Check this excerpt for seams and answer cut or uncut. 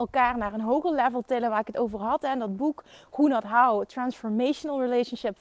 uncut